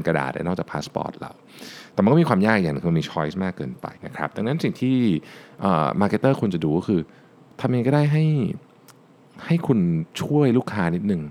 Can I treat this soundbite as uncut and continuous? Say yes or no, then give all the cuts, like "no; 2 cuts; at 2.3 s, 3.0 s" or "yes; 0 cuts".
no; 1 cut; at 4.0 s